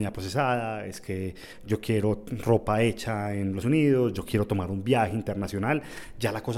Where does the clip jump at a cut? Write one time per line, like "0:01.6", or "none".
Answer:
0:03.6